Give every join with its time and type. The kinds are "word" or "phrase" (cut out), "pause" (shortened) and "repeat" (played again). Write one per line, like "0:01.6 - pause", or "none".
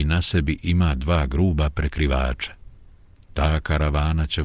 none

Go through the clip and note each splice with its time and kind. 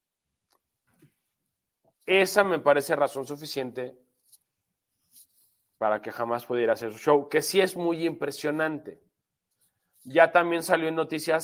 none

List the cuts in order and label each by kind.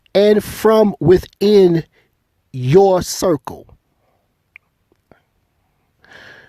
none

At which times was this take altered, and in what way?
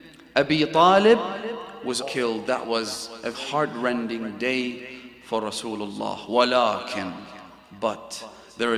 0:02.0 - word
0:03.3 - word

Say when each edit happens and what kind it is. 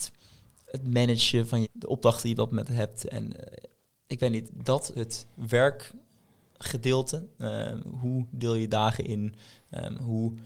0:01.6 - phrase
0:04.4 - word
0:04.9 - word

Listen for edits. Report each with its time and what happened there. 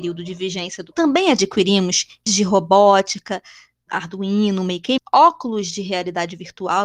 0:00.9 - word
0:02.3 - word
0:03.9 - word
0:05.0 - word

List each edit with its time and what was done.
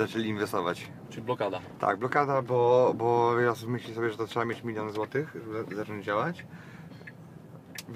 none

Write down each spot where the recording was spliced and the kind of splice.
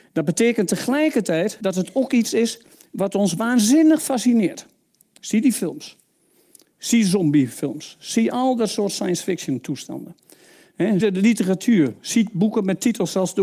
0:01.6 - word
0:11.0 - word

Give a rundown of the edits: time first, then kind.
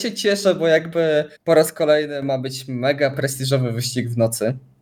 0:01.4 - pause

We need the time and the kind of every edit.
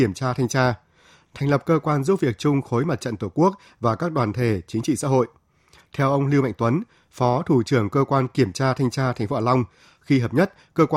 none

